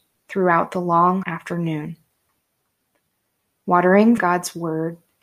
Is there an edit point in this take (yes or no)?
yes